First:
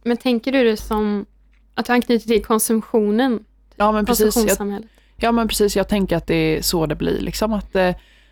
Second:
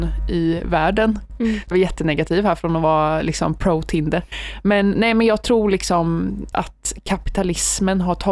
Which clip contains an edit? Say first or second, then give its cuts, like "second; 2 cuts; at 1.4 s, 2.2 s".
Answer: second; 2 cuts; at 1.7 s, 6.5 s